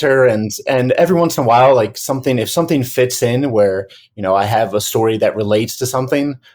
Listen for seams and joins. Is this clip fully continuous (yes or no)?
yes